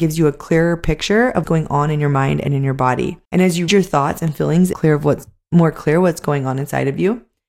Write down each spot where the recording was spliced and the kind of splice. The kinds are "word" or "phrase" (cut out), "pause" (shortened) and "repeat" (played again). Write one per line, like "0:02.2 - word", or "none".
0:01.4 - word
0:03.2 - pause
0:03.7 - word
0:04.7 - phrase